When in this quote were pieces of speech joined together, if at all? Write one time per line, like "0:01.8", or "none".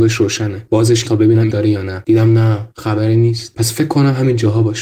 0:01.0
0:01.5
0:02.7